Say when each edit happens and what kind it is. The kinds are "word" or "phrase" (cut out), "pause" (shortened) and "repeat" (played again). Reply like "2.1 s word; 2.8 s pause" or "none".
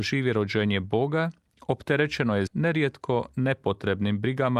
2.5 s word